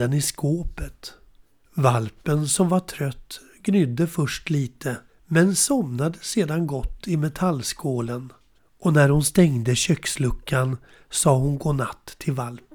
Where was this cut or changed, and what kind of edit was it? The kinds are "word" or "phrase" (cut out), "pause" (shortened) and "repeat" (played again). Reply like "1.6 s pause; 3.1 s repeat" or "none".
1.4 s pause; 5.1 s pause; 8.6 s pause